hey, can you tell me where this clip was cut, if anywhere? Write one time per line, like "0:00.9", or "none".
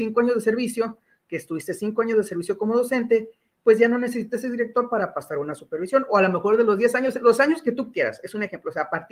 none